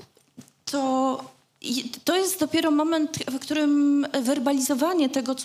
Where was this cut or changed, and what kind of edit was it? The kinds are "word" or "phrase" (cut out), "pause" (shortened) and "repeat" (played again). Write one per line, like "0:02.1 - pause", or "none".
none